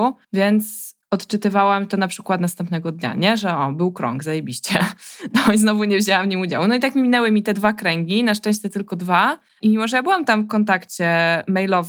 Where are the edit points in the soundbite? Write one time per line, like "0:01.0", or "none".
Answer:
0:09.5